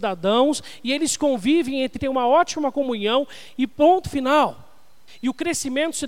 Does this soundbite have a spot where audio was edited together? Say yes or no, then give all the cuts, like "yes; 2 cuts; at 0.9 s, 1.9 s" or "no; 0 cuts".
yes; 1 cut; at 2.0 s